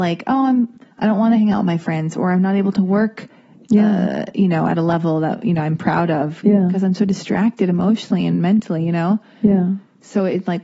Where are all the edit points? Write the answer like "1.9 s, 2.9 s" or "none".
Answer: none